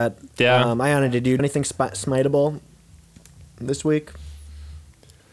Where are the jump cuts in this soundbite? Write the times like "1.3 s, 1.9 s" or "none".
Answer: 1.4 s